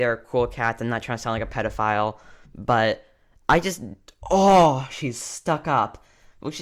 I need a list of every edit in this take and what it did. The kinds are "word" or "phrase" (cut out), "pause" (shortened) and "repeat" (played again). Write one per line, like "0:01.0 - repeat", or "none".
none